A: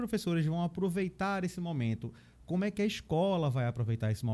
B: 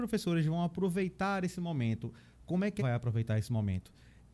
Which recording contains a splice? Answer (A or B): B